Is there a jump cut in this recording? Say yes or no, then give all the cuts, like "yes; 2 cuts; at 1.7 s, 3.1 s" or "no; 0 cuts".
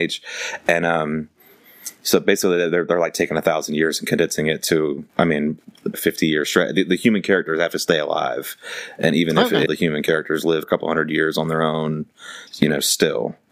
yes; 5 cuts; at 5.1 s, 5.9 s, 9.7 s, 10.6 s, 12.5 s